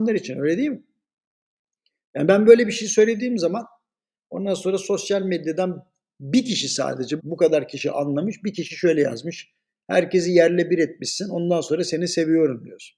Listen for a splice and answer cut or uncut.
cut